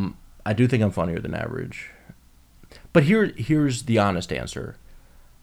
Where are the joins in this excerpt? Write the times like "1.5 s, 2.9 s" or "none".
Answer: none